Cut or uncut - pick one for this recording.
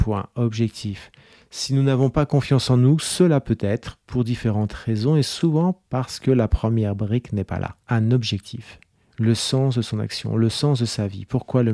uncut